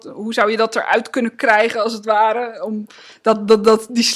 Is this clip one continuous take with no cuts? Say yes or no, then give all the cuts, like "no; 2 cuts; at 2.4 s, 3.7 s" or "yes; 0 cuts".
yes; 0 cuts